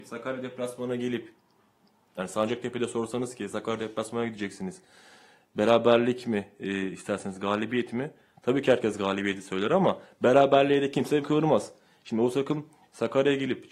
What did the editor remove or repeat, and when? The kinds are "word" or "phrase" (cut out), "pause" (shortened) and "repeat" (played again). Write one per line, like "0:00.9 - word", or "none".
0:11.2 - word